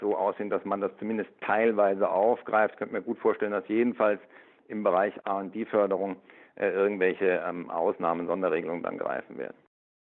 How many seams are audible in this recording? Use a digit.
0